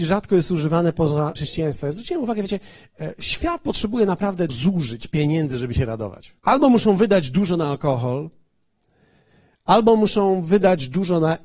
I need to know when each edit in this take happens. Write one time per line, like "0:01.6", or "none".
0:01.4
0:04.5
0:06.4